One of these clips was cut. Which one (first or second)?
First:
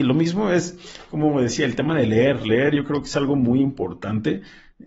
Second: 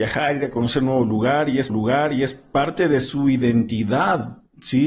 second